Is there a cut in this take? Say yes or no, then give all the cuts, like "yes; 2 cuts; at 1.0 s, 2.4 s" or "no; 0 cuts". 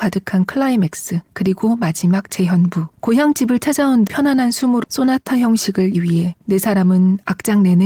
yes; 6 cuts; at 1.2 s, 2.9 s, 4.1 s, 4.8 s, 5.9 s, 6.4 s